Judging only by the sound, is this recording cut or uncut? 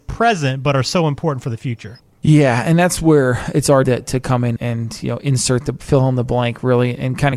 cut